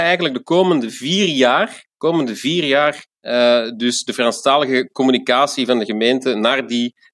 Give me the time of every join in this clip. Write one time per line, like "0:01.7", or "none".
0:01.9
0:03.1